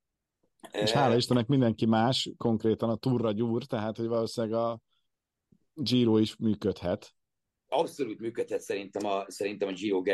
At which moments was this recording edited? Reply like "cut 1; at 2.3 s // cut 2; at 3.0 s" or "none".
none